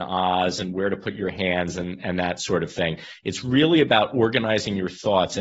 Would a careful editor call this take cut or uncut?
uncut